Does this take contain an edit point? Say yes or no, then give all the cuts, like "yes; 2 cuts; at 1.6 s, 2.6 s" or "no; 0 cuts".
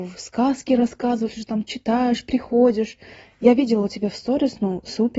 no; 0 cuts